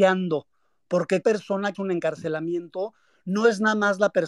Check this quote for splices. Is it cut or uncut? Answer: cut